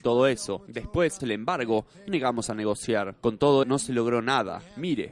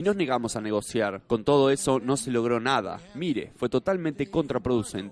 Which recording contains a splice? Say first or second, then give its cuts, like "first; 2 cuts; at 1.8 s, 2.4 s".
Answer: first; 3 cuts; at 1.2 s, 2.1 s, 3.6 s